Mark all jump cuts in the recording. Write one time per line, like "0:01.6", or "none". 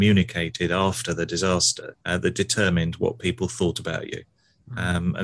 0:02.0